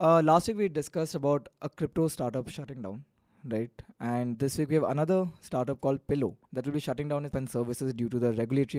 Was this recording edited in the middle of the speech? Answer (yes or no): yes